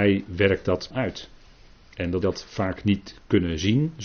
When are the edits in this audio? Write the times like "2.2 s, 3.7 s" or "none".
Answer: 0.9 s, 2.2 s